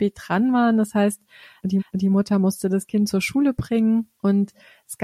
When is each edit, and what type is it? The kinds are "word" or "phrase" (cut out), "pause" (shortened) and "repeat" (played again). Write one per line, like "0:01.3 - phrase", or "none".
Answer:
0:01.8 - repeat